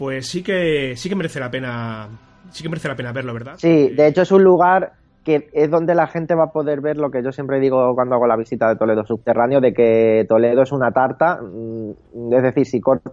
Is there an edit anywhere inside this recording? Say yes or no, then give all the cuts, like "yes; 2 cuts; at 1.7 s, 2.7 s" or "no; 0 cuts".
no; 0 cuts